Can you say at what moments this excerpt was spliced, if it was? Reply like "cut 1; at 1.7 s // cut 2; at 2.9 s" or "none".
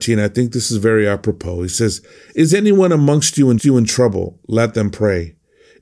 cut 1; at 3.6 s